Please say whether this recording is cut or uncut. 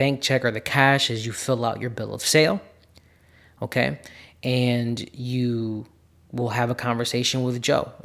uncut